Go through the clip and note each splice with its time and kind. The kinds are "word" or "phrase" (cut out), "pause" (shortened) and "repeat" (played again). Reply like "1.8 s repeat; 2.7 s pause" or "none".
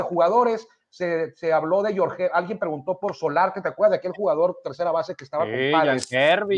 none